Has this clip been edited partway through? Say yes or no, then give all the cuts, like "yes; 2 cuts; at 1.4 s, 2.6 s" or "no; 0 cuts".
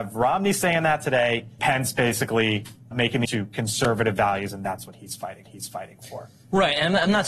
yes; 4 cuts; at 1.6 s, 2.9 s, 3.2 s, 5.4 s